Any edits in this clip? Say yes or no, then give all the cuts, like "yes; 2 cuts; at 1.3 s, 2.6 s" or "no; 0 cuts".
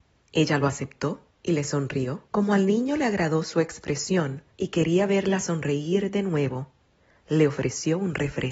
yes; 3 cuts; at 1.3 s, 2.3 s, 4.5 s